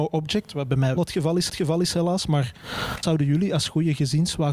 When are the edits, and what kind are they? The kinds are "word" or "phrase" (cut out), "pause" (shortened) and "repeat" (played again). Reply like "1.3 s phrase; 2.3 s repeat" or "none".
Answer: 1.0 s word; 1.5 s repeat; 3.0 s word